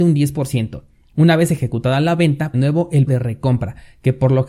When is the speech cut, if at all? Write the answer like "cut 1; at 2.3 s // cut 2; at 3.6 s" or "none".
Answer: cut 1; at 2.5 s // cut 2; at 3.1 s